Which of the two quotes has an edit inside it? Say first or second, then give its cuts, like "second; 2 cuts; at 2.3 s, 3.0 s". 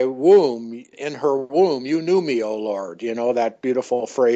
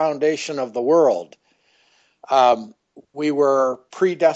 first; 1 cut; at 0.9 s